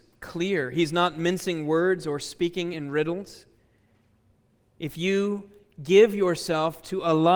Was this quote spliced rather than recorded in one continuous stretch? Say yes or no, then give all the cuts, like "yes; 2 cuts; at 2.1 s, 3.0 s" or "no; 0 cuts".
no; 0 cuts